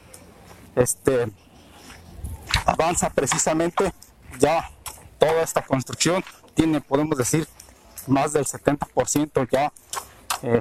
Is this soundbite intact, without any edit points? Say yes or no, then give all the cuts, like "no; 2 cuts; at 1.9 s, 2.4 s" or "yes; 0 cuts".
yes; 0 cuts